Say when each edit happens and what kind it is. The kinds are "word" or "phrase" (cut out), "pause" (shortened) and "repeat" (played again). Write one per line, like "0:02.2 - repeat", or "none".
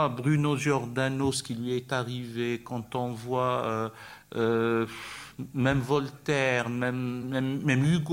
none